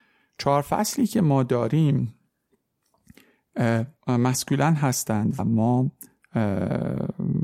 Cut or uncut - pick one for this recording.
cut